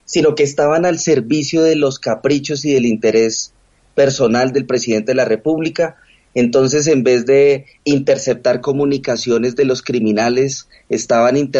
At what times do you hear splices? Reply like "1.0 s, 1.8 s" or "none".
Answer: none